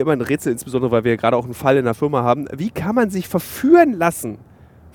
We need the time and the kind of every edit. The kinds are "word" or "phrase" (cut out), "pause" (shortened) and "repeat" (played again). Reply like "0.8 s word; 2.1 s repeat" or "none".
none